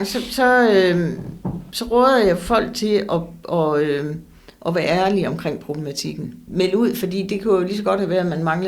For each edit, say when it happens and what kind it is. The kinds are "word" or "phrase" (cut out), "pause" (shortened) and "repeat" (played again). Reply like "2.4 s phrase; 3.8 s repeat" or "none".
none